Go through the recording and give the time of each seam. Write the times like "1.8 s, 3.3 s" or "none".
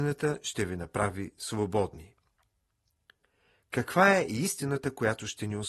none

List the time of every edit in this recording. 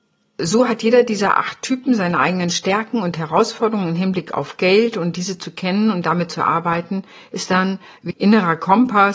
8.1 s

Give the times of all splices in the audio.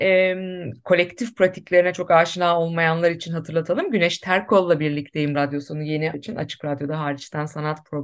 5.3 s, 6.1 s

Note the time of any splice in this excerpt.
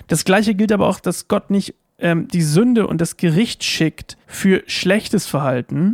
4.2 s

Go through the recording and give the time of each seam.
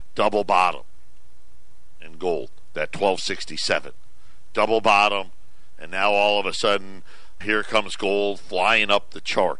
7.4 s

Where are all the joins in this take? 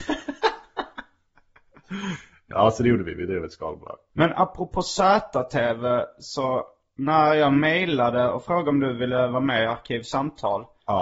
2.5 s

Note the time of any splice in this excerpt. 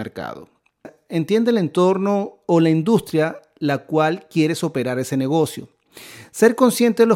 none

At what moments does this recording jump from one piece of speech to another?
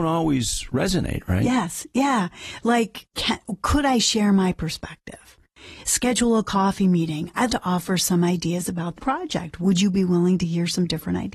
3.1 s, 7.5 s, 9.0 s

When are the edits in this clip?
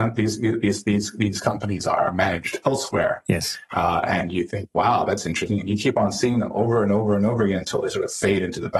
none

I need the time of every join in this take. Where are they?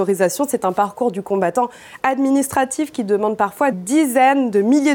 3.7 s

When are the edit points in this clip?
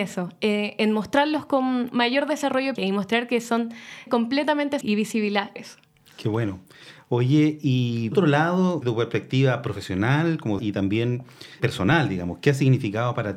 1.9 s, 2.8 s, 4.1 s, 4.8 s, 5.6 s, 8.1 s, 8.8 s, 10.6 s, 11.6 s

